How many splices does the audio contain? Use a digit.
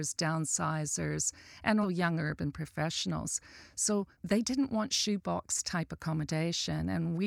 2